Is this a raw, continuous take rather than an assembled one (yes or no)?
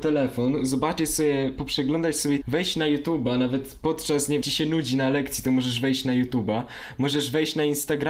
no